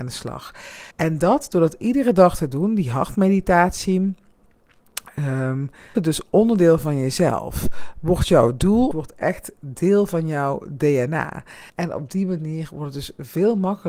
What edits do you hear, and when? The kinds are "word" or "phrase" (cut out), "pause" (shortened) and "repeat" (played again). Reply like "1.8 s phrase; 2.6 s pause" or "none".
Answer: 0.9 s pause; 5.9 s word; 8.9 s phrase; 11.7 s pause